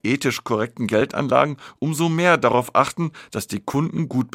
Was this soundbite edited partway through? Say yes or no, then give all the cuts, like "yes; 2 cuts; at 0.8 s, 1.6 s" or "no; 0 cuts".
no; 0 cuts